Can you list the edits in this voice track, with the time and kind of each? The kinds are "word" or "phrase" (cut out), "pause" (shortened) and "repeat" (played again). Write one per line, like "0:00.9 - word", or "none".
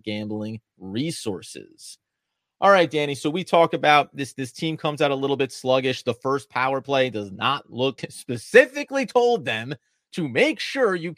0:08.0 - phrase